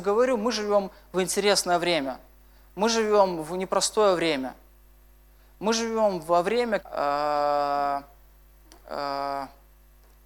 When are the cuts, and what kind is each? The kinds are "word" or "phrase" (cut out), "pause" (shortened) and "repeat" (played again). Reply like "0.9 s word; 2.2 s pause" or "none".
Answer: 6.8 s word